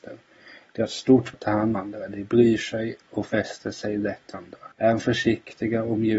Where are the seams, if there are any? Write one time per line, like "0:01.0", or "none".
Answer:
0:01.3
0:01.7
0:04.3
0:04.7